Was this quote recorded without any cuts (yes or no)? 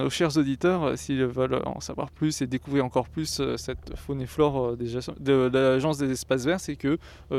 yes